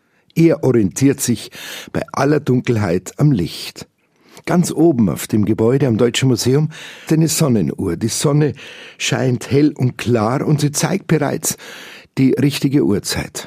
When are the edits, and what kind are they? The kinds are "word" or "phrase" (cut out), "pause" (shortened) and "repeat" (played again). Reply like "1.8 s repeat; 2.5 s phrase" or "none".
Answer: 7.1 s word